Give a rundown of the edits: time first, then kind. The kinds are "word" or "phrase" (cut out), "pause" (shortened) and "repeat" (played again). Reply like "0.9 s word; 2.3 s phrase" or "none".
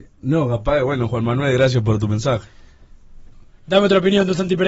none